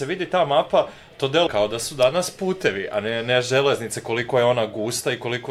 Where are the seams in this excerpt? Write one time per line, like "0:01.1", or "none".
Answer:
0:01.5